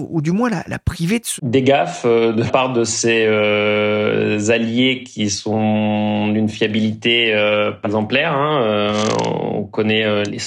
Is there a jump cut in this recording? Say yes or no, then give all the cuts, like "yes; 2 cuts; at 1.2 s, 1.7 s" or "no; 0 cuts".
yes; 3 cuts; at 1.4 s, 2.5 s, 7.8 s